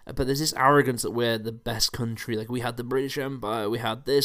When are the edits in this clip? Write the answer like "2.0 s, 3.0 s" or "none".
none